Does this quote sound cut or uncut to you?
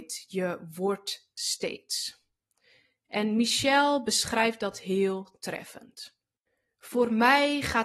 uncut